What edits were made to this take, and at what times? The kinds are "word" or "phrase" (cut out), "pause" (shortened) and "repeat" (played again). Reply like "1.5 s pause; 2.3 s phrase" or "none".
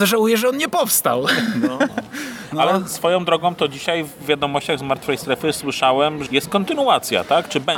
6.3 s word

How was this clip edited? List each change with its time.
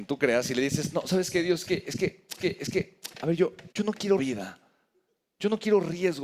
2.4 s repeat; 3.7 s pause; 4.2 s phrase

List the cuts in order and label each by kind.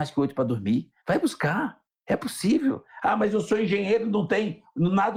none

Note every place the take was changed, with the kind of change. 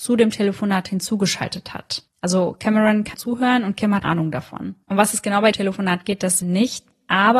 2.1 s pause; 3.1 s word; 4.0 s word; 4.8 s pause; 5.5 s word; 6.4 s phrase

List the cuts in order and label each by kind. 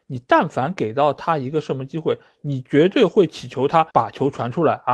3.9 s pause

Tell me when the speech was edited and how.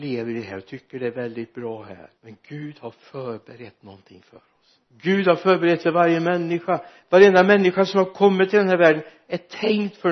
2.2 s pause; 4.8 s pause

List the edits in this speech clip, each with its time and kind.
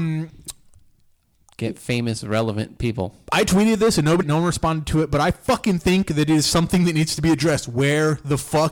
4.2 s word

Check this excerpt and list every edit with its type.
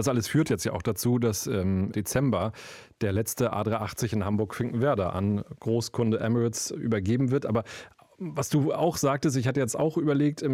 none

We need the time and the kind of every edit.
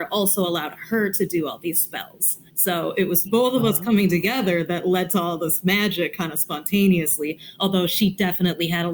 2.5 s pause; 3.3 s word

